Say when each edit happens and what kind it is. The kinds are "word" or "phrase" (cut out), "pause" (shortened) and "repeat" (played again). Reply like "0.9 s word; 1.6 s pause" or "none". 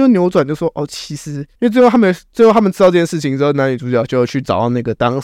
1.5 s pause